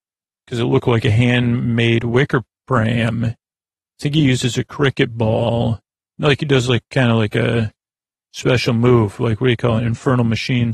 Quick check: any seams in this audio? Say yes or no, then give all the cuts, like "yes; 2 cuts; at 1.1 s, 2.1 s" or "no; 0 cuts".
no; 0 cuts